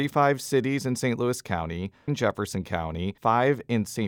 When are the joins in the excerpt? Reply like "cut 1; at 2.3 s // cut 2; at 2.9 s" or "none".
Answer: cut 1; at 2.1 s // cut 2; at 3.2 s